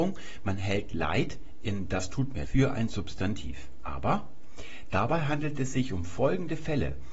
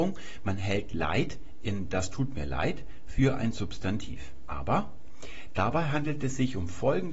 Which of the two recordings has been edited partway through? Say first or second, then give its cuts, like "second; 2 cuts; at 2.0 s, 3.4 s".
first; 1 cut; at 2.4 s